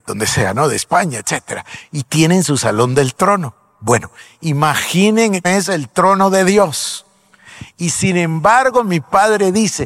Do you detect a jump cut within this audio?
yes; 1 cut; at 5.4 s

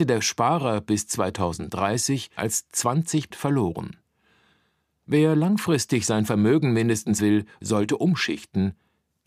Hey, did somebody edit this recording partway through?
yes; 3 cuts; at 2.4 s, 3.3 s, 7.2 s

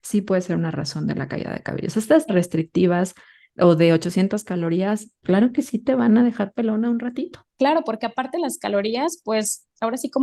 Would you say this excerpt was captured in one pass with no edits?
no; 3 cuts; at 2.3 s, 5.2 s, 7.5 s

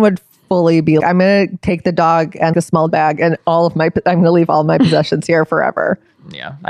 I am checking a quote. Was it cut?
yes; 3 cuts; at 1.0 s, 2.5 s, 2.9 s

